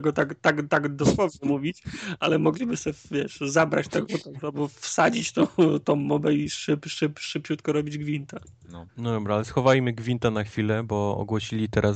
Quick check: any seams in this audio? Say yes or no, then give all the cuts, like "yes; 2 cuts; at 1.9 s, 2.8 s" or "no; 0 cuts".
yes; 1 cut; at 8.9 s